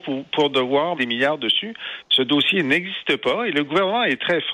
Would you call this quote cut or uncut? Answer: cut